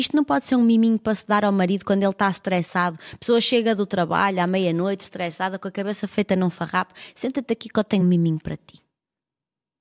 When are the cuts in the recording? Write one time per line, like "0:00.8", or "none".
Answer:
none